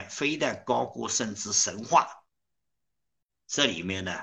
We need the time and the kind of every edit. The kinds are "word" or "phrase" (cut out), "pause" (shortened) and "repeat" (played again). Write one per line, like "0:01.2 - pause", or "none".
0:03.3 - word